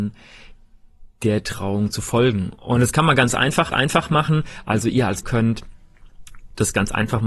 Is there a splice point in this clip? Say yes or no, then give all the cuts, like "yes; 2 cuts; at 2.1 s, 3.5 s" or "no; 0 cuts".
yes; 2 cuts; at 3.7 s, 5.2 s